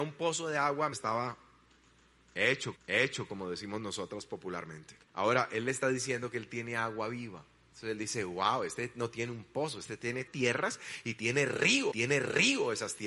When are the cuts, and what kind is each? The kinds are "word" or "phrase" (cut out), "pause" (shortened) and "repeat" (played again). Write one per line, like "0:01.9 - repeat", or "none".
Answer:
0:00.9 - word
0:02.7 - repeat
0:05.0 - pause
0:10.3 - word
0:11.9 - repeat

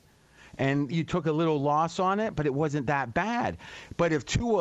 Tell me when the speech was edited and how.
0:00.9 - word

